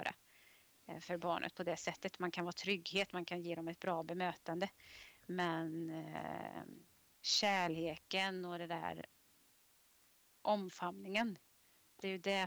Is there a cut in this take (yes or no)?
no